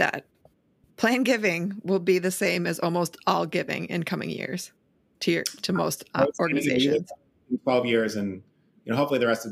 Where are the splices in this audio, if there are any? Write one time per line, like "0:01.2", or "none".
none